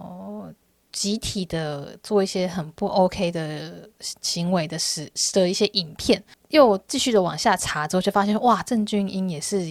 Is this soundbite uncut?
yes; 0 cuts

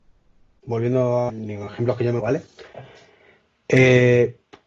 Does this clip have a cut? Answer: yes; 2 cuts; at 1.3 s, 2.2 s

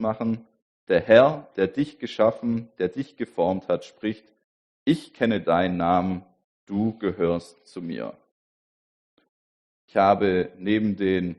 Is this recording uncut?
yes; 0 cuts

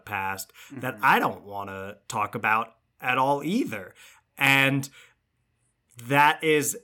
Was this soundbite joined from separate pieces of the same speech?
no; 0 cuts

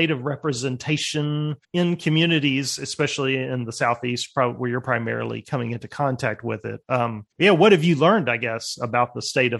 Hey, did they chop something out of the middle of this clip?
yes; 2 cuts; at 1.6 s, 7.3 s

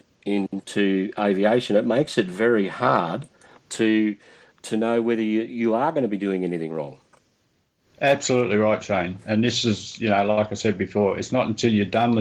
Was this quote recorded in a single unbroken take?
yes; 0 cuts

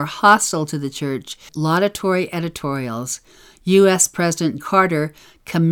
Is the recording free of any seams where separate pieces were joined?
no; 2 cuts; at 1.5 s, 4.6 s

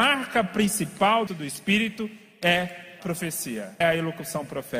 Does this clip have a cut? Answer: yes; 3 cuts; at 1.3 s, 3.0 s, 3.8 s

